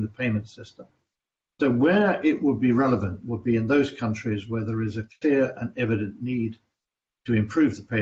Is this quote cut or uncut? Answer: uncut